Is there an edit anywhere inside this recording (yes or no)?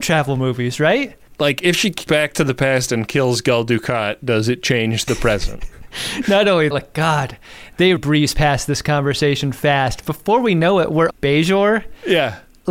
yes